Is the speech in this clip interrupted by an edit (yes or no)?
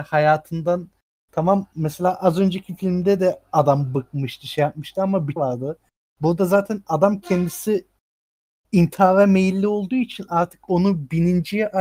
yes